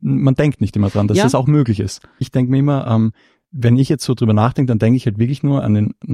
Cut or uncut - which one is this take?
uncut